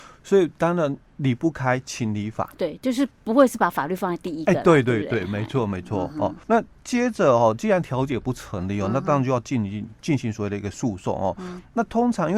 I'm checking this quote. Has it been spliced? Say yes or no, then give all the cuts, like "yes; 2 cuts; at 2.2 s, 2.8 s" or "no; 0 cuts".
yes; 2 cuts; at 3.1 s, 6.4 s